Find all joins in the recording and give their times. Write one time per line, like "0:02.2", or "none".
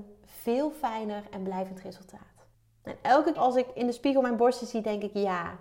0:02.5
0:03.3